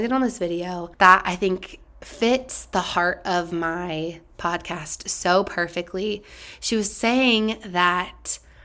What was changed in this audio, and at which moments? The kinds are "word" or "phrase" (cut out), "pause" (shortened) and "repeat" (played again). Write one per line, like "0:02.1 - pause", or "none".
0:00.9 - pause